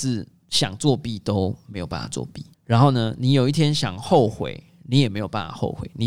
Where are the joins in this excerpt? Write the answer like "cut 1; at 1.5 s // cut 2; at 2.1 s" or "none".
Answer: cut 1; at 2.5 s